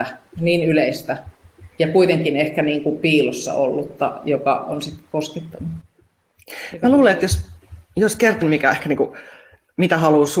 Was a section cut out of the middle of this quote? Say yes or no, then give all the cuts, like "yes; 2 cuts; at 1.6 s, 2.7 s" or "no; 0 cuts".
yes; 2 cuts; at 1.7 s, 8.4 s